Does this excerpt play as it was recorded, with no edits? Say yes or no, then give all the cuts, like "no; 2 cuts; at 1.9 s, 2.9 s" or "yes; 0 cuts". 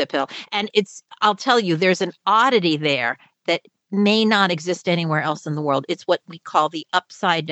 yes; 0 cuts